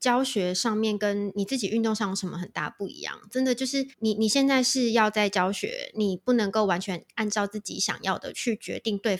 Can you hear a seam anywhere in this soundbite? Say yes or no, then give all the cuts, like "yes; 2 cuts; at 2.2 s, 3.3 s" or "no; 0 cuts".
yes; 1 cut; at 3.9 s